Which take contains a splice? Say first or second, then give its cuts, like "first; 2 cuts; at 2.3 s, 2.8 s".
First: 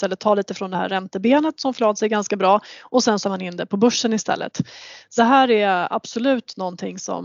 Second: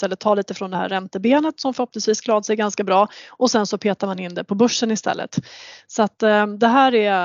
first; 3 cuts; at 1.7 s, 3.2 s, 5.2 s